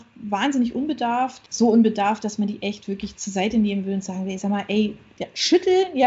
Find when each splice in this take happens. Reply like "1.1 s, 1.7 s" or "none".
none